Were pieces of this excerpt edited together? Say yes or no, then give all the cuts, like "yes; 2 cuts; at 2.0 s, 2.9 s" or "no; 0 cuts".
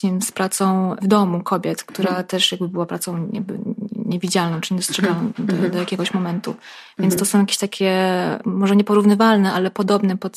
no; 0 cuts